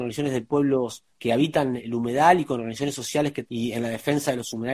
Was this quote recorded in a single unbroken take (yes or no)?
no